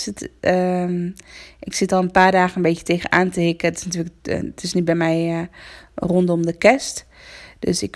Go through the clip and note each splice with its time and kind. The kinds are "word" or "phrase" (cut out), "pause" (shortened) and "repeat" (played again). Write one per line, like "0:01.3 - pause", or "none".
none